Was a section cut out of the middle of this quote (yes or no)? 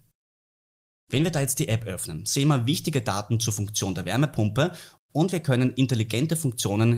no